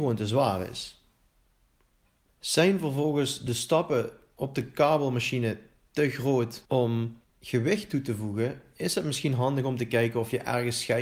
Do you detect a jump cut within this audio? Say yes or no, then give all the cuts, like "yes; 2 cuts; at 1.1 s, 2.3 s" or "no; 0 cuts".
no; 0 cuts